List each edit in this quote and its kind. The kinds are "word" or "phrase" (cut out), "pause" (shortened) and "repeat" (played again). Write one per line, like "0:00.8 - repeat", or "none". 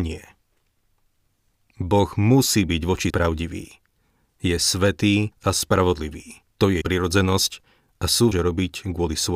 0:03.1 - word
0:05.3 - pause
0:06.5 - pause
0:06.8 - word
0:08.3 - phrase